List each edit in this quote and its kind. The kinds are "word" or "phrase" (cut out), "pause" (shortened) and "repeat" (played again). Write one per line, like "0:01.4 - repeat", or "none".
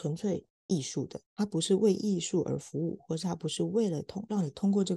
0:01.3 - pause